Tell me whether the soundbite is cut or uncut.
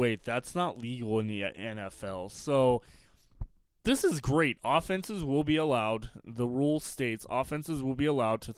cut